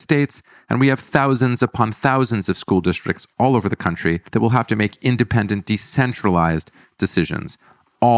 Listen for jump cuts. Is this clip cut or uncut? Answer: cut